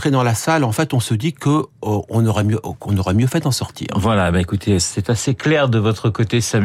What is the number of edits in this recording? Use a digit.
0